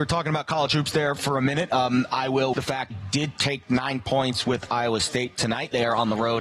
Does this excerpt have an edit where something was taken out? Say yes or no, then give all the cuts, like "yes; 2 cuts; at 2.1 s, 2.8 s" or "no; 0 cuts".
yes; 2 cuts; at 2.5 s, 2.9 s